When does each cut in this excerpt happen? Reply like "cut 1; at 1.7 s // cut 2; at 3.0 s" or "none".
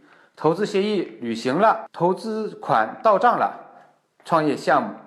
none